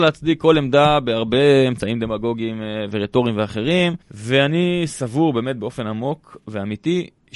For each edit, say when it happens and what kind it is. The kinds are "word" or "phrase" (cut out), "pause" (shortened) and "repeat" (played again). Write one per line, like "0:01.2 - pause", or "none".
0:04.0 - pause